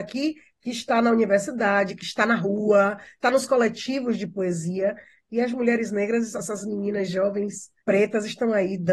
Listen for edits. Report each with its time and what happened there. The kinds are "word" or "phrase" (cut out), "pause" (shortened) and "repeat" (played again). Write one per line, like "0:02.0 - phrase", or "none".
0:03.2 - word
0:07.8 - pause